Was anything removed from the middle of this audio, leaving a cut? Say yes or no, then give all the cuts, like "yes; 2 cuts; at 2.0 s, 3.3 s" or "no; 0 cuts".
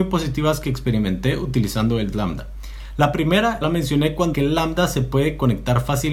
yes; 3 cuts; at 2.1 s, 3.6 s, 4.3 s